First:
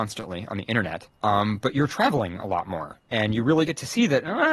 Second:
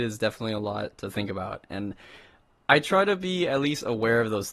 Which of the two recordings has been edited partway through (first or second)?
first